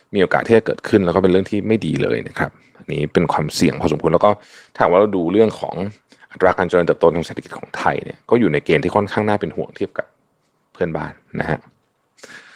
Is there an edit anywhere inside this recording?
no; 0 cuts

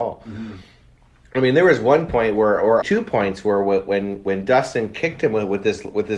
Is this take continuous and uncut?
no; 1 cut; at 2.8 s

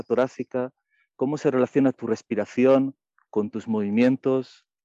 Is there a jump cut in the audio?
no; 0 cuts

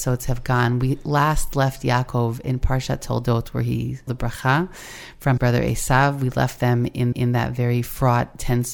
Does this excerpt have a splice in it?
yes; 4 cuts; at 2.4 s, 4.1 s, 5.4 s, 7.1 s

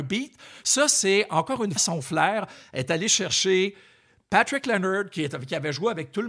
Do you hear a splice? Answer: yes; 1 cut; at 1.8 s

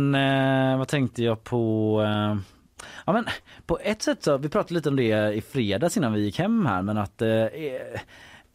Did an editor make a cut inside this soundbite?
no; 0 cuts

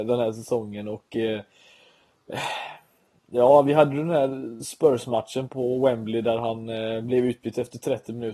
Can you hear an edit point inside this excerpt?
yes; 1 cut; at 5.5 s

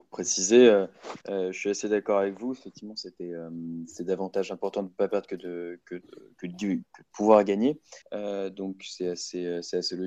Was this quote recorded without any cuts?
no; 2 cuts; at 1.2 s, 8.0 s

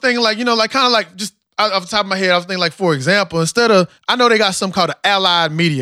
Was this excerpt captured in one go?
no; 1 cut; at 4.0 s

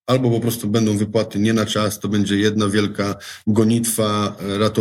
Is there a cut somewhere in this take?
no; 0 cuts

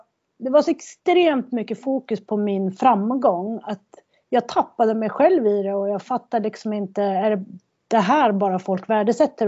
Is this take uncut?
yes; 0 cuts

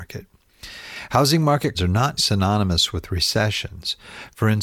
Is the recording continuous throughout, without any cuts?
no; 2 cuts; at 1.7 s, 2.2 s

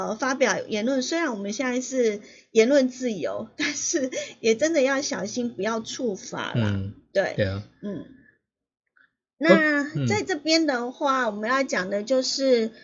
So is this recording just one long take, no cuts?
yes; 0 cuts

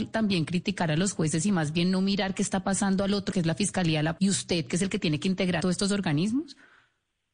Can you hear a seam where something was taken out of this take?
yes; 3 cuts; at 3.3 s, 4.2 s, 5.6 s

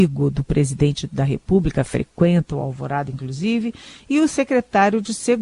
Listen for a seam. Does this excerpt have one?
no; 0 cuts

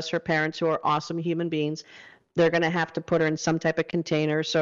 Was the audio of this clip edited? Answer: no; 0 cuts

